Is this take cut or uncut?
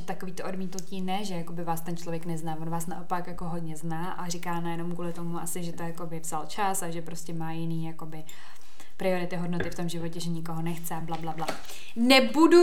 uncut